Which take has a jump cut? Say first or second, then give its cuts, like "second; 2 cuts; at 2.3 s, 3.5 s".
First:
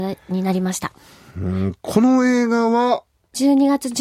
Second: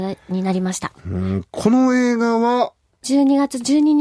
second; 1 cut; at 1.0 s